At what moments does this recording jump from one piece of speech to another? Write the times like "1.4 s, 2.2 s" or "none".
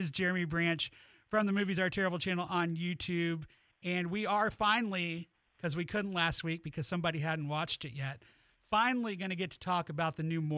none